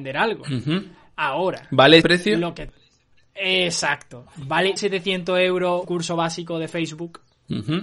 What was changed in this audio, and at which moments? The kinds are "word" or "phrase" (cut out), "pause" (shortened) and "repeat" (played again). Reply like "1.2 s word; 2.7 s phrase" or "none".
2.0 s word; 4.8 s word; 5.8 s word